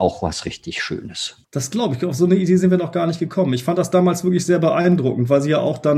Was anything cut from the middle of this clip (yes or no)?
no